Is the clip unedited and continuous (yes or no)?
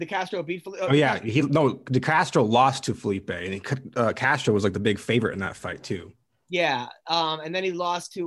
yes